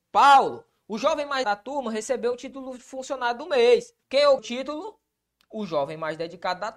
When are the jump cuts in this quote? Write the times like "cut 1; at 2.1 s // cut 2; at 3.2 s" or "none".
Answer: cut 1; at 1.4 s // cut 2; at 4.0 s // cut 3; at 4.4 s